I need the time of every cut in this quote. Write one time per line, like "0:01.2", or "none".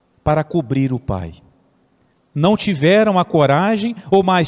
none